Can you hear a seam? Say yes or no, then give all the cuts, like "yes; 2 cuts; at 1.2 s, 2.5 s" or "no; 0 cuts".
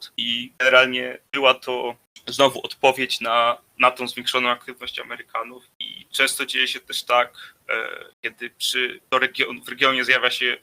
yes; 2 cuts; at 1.3 s, 8.1 s